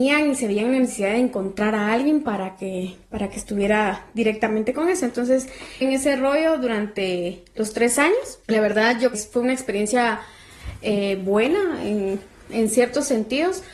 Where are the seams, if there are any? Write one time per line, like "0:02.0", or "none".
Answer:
0:05.8
0:08.4
0:09.1